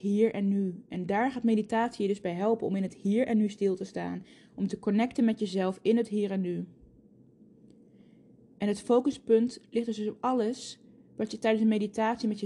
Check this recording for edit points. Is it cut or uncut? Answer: uncut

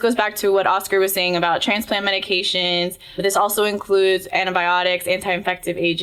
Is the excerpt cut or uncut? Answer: uncut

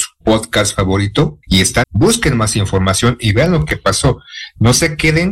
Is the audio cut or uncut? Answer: cut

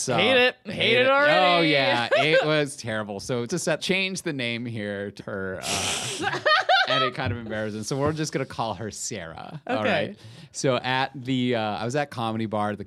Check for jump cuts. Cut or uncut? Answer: cut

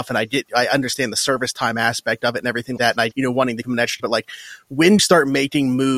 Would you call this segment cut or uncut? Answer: cut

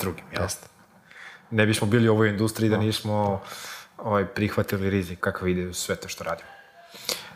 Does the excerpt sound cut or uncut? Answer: cut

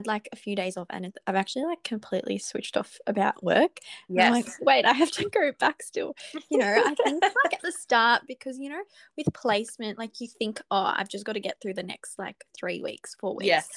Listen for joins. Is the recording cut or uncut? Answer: uncut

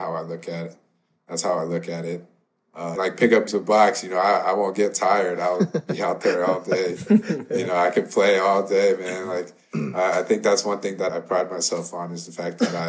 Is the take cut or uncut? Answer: cut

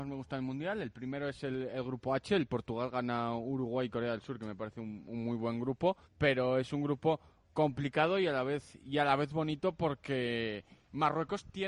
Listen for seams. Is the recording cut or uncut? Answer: cut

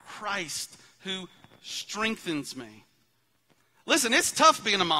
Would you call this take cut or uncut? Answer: uncut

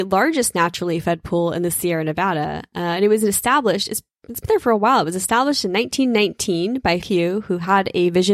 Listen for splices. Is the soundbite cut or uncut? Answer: cut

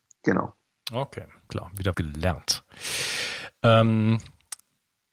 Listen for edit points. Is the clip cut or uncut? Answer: cut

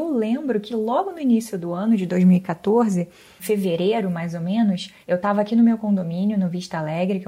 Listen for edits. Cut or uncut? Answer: cut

